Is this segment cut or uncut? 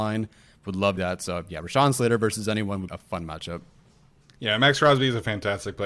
cut